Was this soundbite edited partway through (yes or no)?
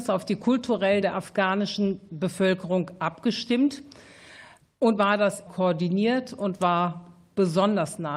yes